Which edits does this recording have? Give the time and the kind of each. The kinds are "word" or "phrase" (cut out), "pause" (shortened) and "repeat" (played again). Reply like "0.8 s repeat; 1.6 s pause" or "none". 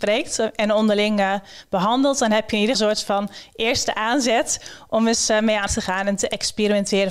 2.7 s phrase; 5.7 s phrase